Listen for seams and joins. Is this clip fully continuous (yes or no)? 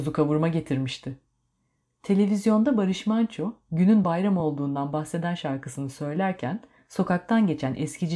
yes